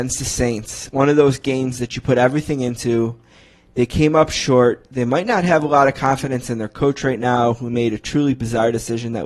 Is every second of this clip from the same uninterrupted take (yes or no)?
yes